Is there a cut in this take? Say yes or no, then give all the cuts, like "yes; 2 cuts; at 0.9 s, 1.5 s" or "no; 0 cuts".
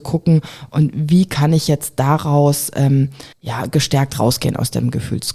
yes; 1 cut; at 3.3 s